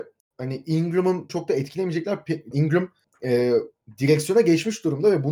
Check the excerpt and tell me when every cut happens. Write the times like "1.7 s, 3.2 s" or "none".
1.3 s